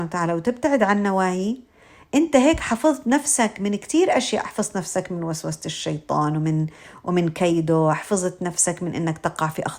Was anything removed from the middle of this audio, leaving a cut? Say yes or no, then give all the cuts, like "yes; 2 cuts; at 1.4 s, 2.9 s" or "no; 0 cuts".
no; 0 cuts